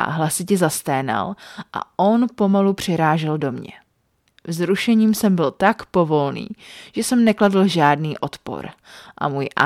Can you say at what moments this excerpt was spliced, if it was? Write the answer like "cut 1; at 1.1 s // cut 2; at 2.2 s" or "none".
none